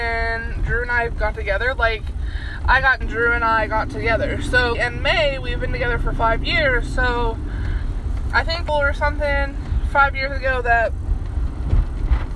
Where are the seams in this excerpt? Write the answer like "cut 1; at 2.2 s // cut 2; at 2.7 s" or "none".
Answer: cut 1; at 3.0 s // cut 2; at 4.7 s // cut 3; at 8.7 s